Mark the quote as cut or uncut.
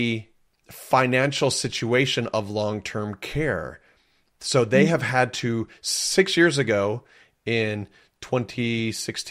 uncut